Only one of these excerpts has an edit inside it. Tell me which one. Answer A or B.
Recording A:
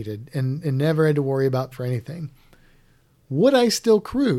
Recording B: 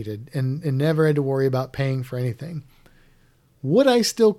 A